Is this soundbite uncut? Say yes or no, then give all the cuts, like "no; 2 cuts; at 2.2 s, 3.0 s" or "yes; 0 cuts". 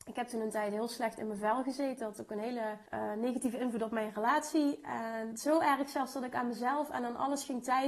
no; 2 cuts; at 2.9 s, 5.3 s